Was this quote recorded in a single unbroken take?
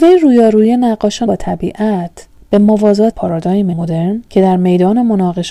no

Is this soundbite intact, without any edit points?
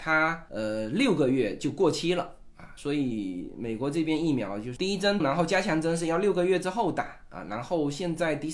no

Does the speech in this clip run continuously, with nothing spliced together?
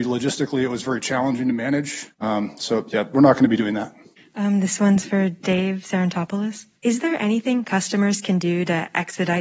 no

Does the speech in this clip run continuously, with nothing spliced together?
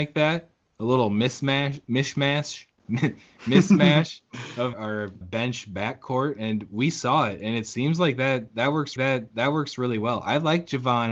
no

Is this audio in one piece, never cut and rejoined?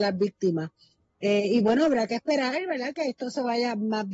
yes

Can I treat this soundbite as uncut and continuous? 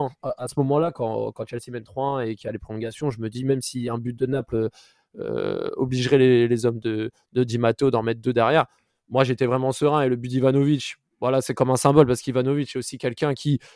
yes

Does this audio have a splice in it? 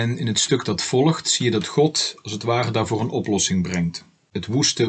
no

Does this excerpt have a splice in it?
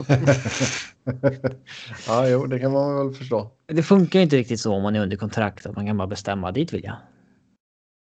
no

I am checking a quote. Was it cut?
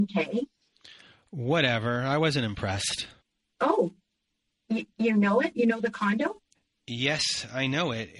yes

